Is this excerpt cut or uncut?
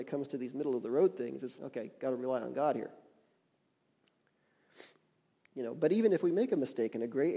cut